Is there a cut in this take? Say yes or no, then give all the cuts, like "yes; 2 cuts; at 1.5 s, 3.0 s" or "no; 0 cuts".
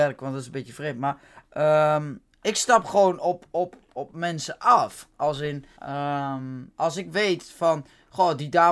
yes; 1 cut; at 5.8 s